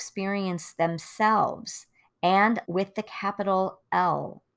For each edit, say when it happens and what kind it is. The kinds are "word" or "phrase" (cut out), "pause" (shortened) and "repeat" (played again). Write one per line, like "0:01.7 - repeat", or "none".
0:02.7 - word